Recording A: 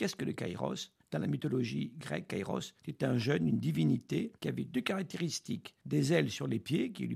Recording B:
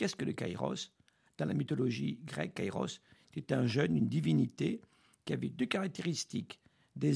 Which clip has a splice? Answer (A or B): A